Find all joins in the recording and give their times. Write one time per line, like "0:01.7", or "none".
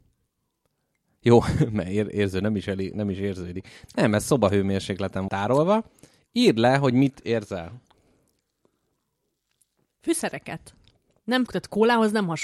0:05.3
0:11.5